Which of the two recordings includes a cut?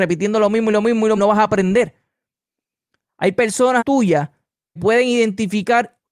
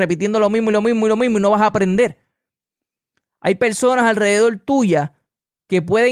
first; 3 cuts; at 1.2 s, 3.8 s, 4.8 s

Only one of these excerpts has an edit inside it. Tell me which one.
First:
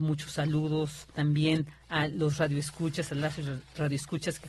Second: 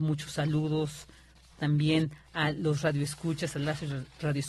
first; 1 cut; at 1.1 s

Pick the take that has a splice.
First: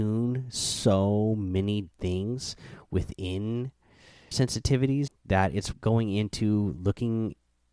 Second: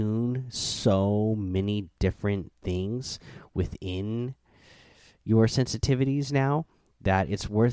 first; 4 cuts; at 1.9 s, 4.3 s, 5.1 s, 5.7 s

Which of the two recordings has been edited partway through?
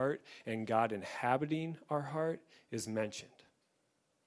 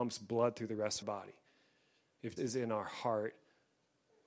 second; 2 cuts; at 1.0 s, 2.4 s

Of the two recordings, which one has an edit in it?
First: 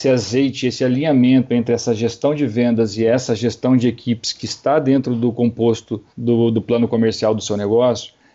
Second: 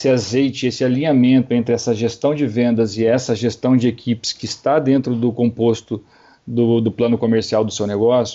first; 1 cut; at 6.1 s

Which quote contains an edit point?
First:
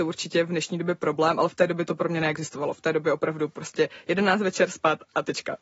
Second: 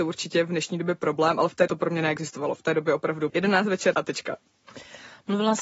second; 3 cuts; at 1.7 s, 3.3 s, 3.9 s

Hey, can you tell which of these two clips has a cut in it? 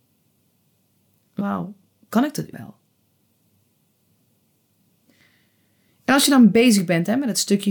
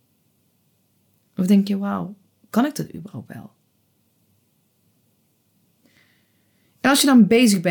first; 2 cuts; at 1.4 s, 2.5 s

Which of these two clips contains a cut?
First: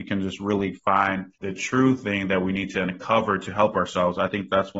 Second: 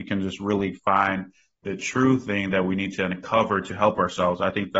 first; 1 cut; at 1.4 s

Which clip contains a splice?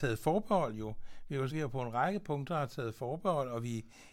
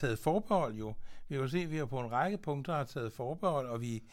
first; 1 cut; at 1.5 s

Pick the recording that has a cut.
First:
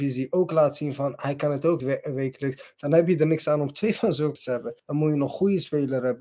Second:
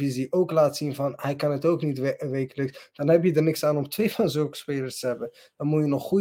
first; 3 cuts; at 1.8 s, 4.4 s, 4.8 s

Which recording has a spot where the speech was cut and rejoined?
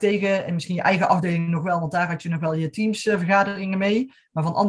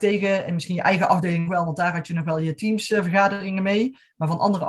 second; 1 cut; at 1.5 s

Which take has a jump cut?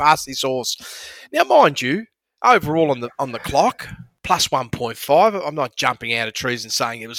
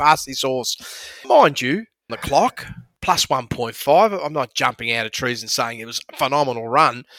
second; 2 cuts; at 1.2 s, 2.1 s

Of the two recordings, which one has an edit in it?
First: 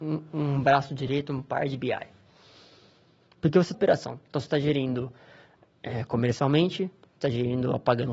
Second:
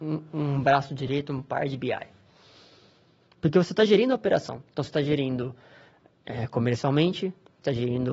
first; 1 cut; at 3.7 s

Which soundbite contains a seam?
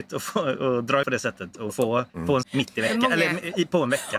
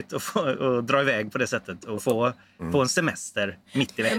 first; 3 cuts; at 1.0 s, 2.1 s, 2.4 s

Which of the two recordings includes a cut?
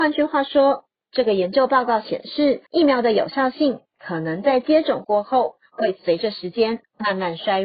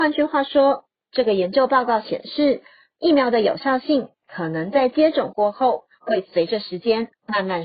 first; 1 cut; at 2.7 s

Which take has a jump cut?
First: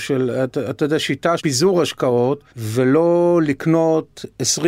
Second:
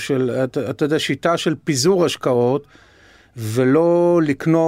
first; 2 cuts; at 1.4 s, 2.5 s

